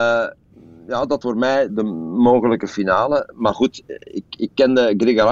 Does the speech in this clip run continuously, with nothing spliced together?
no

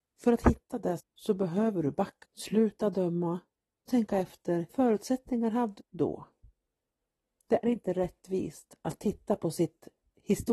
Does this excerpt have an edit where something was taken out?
yes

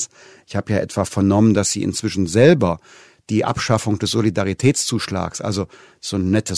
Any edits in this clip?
no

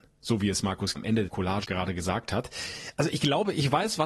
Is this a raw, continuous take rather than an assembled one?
no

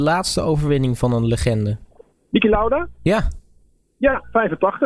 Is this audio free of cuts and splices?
no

